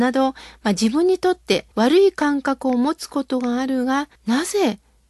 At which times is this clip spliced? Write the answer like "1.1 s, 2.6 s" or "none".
1.7 s, 4.1 s

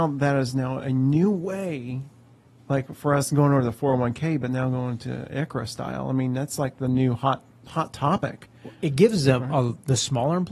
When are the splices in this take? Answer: 8.7 s

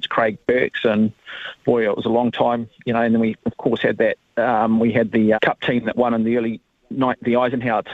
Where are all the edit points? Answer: 5.3 s

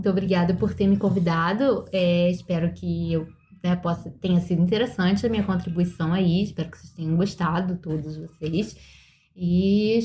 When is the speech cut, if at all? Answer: none

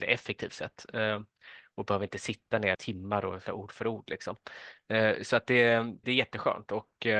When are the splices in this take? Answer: 2.7 s, 3.5 s, 6.0 s

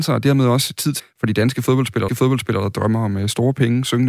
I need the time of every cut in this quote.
1.0 s, 2.1 s

